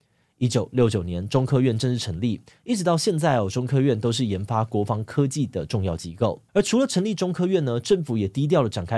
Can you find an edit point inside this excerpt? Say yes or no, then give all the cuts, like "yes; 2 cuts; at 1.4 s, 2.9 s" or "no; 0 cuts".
yes; 1 cut; at 6.5 s